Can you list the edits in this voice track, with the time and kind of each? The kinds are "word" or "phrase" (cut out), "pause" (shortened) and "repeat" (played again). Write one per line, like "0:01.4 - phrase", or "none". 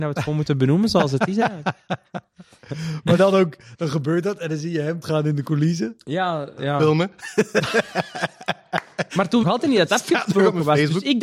0:05.0 - word
0:09.4 - phrase